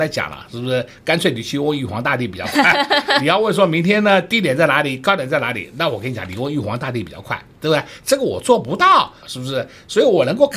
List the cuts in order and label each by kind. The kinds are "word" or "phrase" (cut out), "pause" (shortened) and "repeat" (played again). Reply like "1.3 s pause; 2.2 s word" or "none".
9.2 s phrase